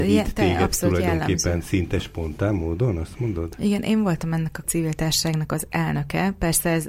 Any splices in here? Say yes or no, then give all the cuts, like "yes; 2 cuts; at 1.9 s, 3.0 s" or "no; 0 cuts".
yes; 1 cut; at 4.6 s